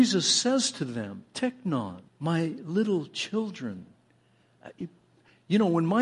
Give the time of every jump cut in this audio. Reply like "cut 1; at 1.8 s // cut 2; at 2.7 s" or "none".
cut 1; at 2.1 s